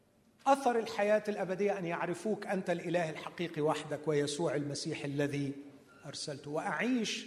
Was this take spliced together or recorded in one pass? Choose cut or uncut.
uncut